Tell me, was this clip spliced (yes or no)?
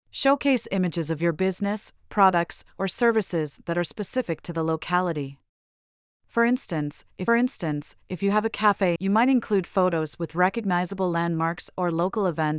yes